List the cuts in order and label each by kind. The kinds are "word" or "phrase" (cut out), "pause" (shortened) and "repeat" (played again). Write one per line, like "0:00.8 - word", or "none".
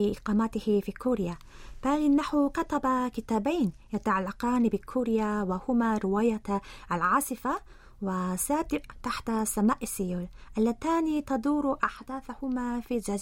none